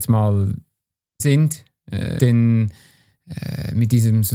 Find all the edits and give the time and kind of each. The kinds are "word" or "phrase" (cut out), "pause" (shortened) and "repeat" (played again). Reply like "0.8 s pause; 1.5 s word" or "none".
1.2 s word; 2.2 s word